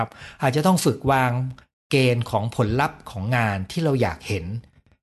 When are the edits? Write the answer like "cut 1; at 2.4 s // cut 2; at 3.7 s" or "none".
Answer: none